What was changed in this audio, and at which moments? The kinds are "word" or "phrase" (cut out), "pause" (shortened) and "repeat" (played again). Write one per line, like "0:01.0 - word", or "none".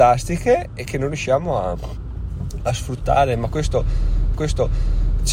0:04.3 - repeat